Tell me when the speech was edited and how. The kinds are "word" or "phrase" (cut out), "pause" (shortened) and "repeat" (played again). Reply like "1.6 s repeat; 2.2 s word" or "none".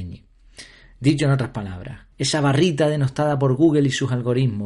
2.1 s pause